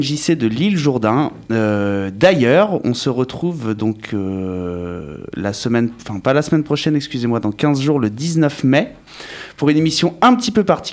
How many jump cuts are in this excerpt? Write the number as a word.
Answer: zero